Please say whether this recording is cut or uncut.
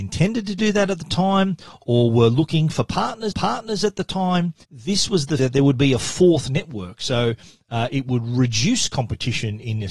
cut